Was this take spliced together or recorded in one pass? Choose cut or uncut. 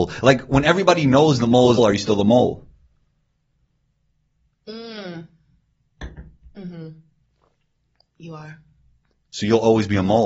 cut